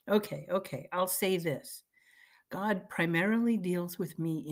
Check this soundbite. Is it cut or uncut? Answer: uncut